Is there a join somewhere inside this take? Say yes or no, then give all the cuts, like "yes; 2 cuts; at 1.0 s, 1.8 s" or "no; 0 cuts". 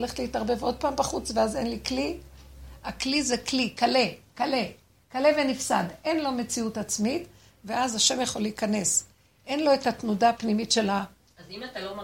no; 0 cuts